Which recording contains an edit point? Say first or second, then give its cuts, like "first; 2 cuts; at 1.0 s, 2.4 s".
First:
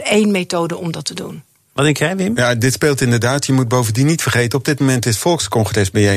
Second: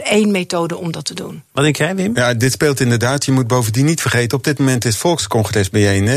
second; 1 cut; at 1.5 s